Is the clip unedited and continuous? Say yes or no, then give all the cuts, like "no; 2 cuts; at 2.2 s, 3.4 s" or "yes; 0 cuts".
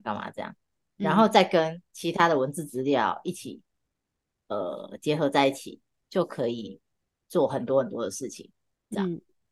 yes; 0 cuts